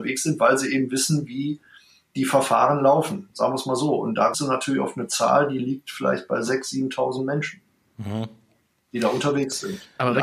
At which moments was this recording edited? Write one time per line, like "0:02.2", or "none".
0:04.3

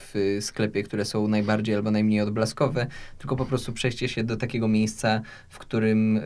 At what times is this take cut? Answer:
none

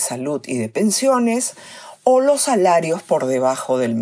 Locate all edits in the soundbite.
none

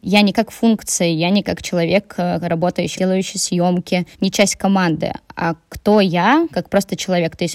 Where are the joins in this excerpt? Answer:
0:02.9

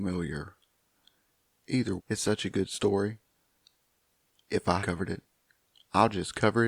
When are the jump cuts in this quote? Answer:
0:02.0
0:04.8

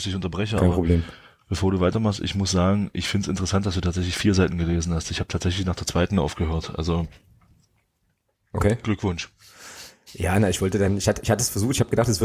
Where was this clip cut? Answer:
none

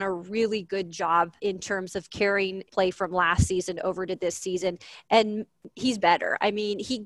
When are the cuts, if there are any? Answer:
0:01.4
0:02.7
0:06.0

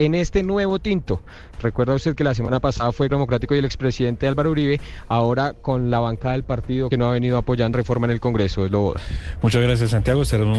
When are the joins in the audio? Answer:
0:03.1
0:06.9
0:07.7

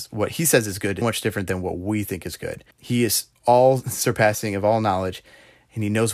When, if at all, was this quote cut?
0:01.0
0:02.7
0:03.3

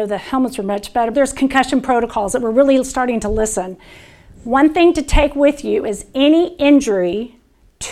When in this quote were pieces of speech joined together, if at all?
0:01.1

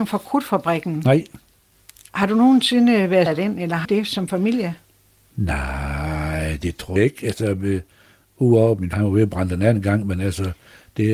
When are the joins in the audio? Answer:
0:03.3
0:03.8
0:07.0
0:08.9

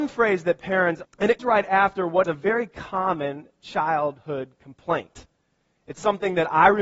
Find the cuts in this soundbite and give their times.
0:01.0
0:01.4
0:02.2

